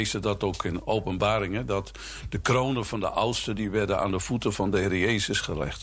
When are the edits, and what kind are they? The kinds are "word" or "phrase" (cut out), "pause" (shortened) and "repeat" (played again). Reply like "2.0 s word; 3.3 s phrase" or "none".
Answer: none